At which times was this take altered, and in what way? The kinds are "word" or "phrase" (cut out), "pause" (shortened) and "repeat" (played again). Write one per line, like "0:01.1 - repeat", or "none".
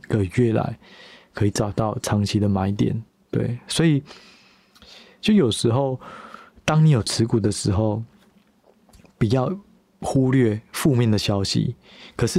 0:03.1 - pause